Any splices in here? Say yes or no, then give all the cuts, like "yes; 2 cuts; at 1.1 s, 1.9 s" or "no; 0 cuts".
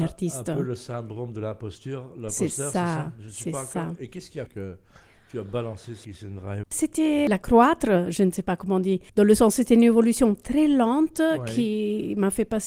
yes; 4 cuts; at 4.5 s, 6.0 s, 6.6 s, 9.1 s